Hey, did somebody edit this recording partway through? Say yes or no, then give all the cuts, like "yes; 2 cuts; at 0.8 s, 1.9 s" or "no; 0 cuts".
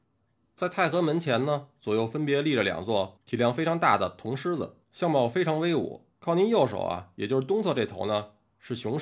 yes; 2 cuts; at 4.8 s, 6.1 s